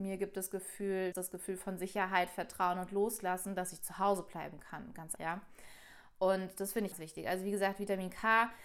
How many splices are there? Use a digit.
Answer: 3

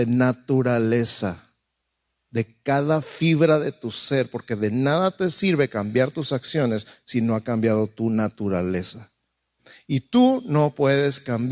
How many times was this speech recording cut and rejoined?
0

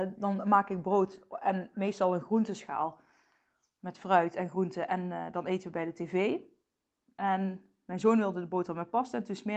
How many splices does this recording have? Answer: 0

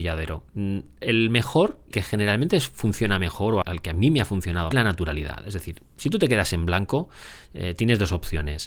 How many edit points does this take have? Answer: 3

